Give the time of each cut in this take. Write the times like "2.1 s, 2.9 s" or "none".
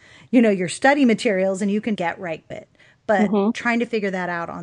2.0 s, 2.5 s